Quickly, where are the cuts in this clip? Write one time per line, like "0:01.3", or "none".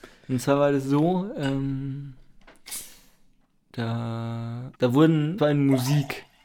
0:04.7
0:05.4